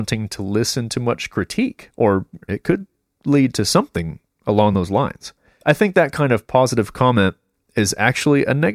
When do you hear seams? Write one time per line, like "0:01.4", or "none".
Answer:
none